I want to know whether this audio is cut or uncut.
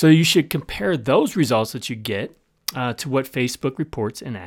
uncut